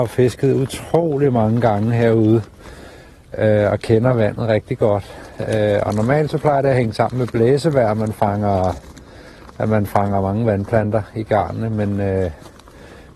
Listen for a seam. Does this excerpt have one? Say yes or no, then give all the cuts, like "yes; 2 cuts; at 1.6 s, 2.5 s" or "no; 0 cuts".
no; 0 cuts